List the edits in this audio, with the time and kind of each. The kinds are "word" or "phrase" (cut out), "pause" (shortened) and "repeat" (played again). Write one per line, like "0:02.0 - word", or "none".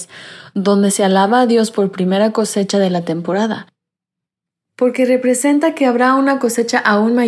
none